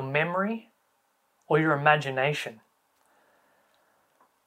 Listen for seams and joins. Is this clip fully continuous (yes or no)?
yes